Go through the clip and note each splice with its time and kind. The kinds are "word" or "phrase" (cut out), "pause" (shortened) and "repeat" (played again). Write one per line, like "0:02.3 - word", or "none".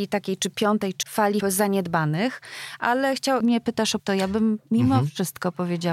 0:01.0 - word
0:01.4 - word
0:03.4 - word
0:04.0 - word